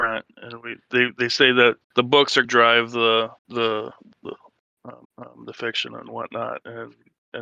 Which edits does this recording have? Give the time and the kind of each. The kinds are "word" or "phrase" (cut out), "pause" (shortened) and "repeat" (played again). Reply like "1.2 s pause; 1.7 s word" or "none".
1.8 s pause; 2.4 s phrase; 3.4 s pause; 4.1 s word; 5.0 s repeat